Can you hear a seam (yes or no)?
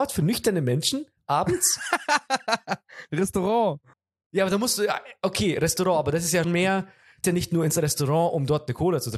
yes